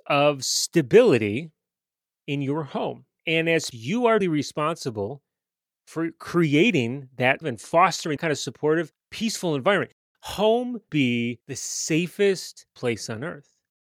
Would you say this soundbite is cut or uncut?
cut